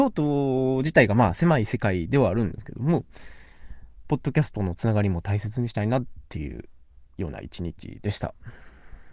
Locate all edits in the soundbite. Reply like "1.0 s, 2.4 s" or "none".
7.1 s